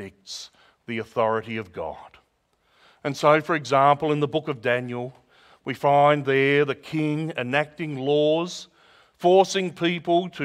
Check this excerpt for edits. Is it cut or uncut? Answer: uncut